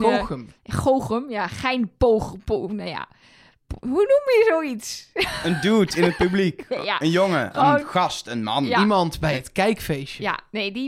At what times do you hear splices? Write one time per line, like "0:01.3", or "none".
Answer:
none

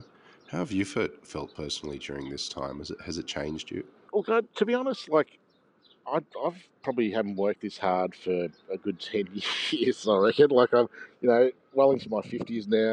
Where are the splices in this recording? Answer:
none

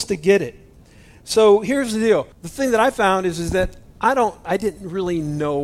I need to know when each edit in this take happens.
0:02.3
0:04.4

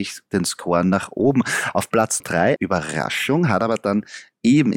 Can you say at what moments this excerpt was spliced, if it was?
0:02.2
0:02.6

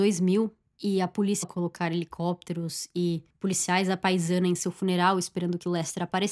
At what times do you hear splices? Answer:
0:01.4

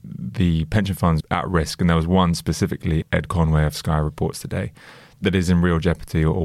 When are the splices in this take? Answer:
0:01.2

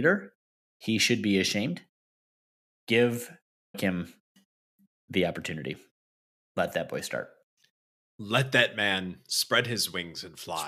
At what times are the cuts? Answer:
0:03.7

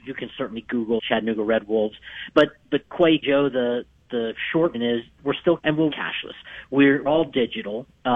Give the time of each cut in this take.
0:01.0
0:03.2
0:04.7
0:05.2
0:05.6
0:05.9
0:07.1

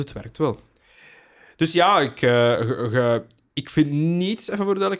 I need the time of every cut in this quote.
none

